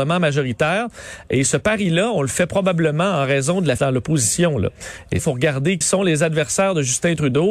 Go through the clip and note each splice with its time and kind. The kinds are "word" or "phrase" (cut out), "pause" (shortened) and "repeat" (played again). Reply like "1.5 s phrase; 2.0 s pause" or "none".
3.8 s word; 5.2 s word; 5.8 s word